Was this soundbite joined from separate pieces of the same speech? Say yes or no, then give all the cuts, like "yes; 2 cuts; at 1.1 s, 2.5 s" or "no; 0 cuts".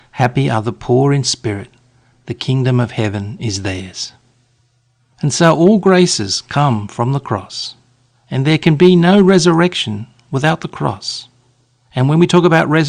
no; 0 cuts